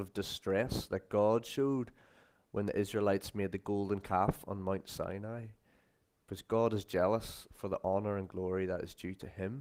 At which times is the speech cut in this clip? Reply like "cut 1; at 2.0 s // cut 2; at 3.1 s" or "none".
none